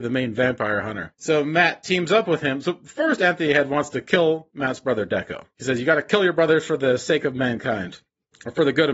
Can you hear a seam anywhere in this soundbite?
no; 0 cuts

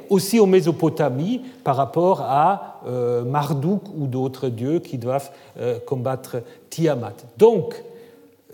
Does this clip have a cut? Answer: no; 0 cuts

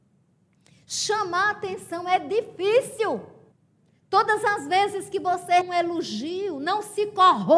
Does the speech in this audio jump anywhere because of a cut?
yes; 2 cuts; at 3.5 s, 5.6 s

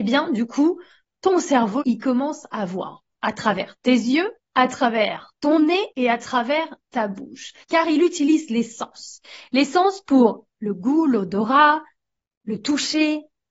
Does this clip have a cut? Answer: yes; 4 cuts; at 1.8 s, 4.4 s, 5.9 s, 7.6 s

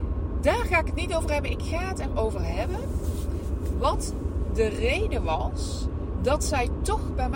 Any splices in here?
no; 0 cuts

